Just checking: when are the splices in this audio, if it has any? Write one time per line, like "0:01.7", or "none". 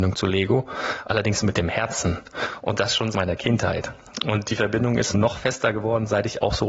0:03.1
0:05.1